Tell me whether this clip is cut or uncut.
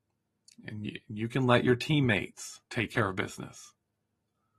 cut